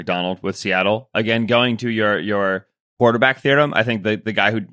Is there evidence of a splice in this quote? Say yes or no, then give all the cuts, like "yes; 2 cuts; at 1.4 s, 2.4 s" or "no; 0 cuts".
no; 0 cuts